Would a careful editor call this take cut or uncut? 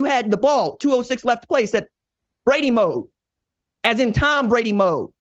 uncut